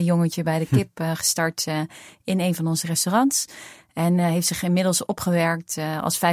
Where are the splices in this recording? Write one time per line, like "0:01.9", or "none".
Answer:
none